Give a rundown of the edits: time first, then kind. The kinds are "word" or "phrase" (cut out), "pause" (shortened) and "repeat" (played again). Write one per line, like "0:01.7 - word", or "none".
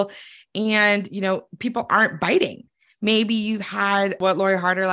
none

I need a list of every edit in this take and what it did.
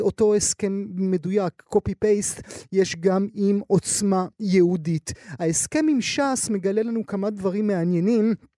none

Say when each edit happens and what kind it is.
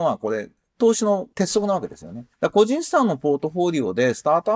0:02.3 - pause

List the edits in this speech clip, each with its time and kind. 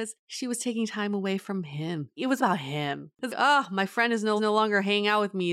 0:02.4 - word
0:03.3 - word
0:04.4 - repeat

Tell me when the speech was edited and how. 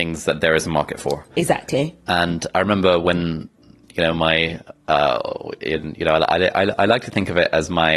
none

